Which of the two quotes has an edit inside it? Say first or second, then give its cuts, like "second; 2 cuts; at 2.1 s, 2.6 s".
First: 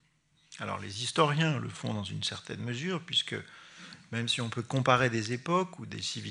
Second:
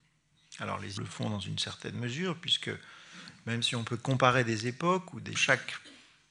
second; 2 cuts; at 1.0 s, 5.3 s